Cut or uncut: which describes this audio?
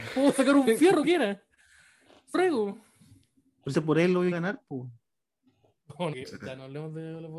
cut